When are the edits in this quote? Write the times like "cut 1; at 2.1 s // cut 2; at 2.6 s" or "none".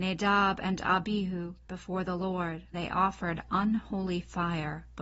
cut 1; at 1.7 s // cut 2; at 2.7 s